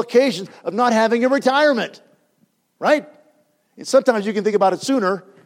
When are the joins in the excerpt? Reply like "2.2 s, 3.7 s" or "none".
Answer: none